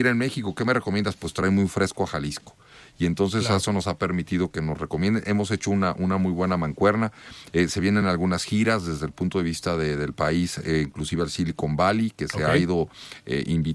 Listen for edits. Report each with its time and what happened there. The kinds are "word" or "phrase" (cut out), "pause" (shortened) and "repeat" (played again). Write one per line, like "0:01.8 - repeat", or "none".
none